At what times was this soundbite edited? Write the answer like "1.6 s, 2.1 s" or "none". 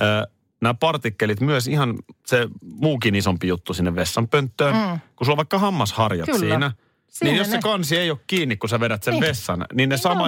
2.2 s

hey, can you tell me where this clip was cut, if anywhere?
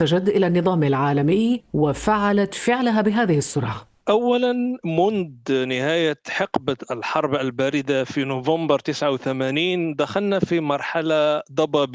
4.0 s

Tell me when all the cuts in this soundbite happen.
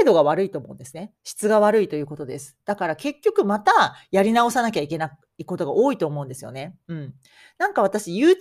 1.2 s

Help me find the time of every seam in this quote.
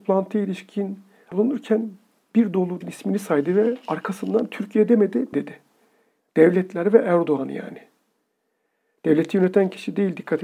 1.3 s, 2.8 s, 5.3 s

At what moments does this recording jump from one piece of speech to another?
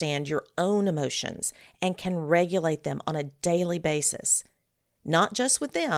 none

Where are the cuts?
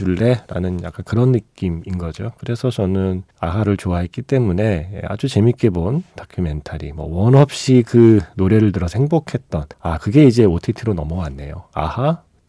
3.3 s, 9.7 s

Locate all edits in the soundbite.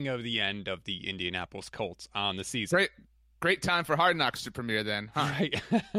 none

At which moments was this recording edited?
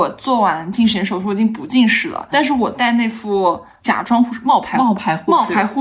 2.3 s

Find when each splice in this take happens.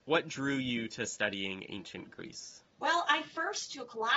2.7 s

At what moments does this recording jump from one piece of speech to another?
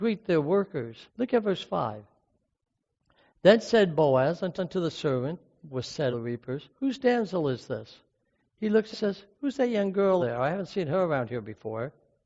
1.1 s, 4.6 s, 5.7 s, 6.1 s, 6.7 s, 8.9 s, 9.3 s, 10.2 s

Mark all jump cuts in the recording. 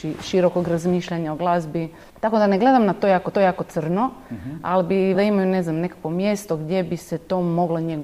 2.1 s, 3.3 s, 5.1 s

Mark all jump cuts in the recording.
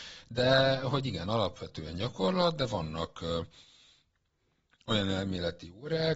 none

